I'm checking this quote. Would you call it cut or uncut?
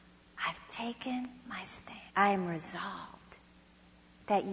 cut